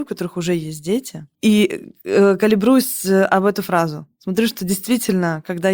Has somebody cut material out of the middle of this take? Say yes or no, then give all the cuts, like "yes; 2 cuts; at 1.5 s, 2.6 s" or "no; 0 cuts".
no; 0 cuts